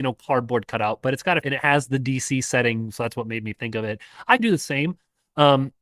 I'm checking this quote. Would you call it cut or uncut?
cut